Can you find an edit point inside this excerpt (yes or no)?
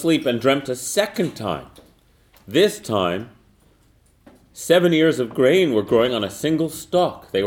no